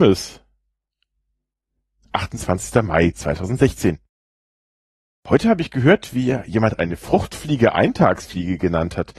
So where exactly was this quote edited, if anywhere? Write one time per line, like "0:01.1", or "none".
none

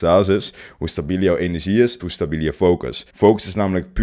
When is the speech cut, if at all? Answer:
0:02.0
0:03.1

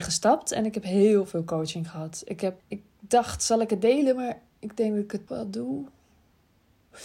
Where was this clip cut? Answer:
0:02.6
0:05.3

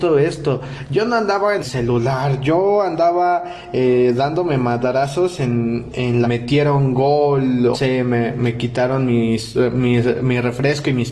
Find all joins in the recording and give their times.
0:01.6
0:06.2
0:07.7

